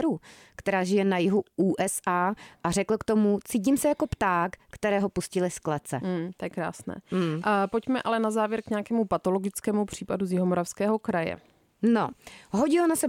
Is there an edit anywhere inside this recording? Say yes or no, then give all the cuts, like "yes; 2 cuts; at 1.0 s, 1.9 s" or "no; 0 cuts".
no; 0 cuts